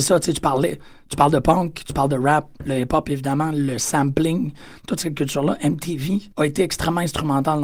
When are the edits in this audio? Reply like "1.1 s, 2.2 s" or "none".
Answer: 6.3 s